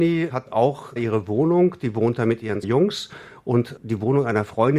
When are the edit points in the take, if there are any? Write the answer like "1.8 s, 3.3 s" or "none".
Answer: 1.0 s, 2.6 s, 3.8 s